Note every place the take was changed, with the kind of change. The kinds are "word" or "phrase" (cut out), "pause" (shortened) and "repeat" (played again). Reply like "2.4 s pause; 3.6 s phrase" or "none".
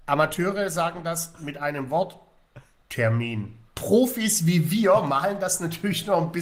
3.7 s pause